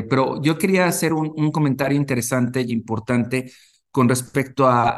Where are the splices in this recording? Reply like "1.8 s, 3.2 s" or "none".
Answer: none